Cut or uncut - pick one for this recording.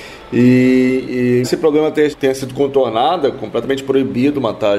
cut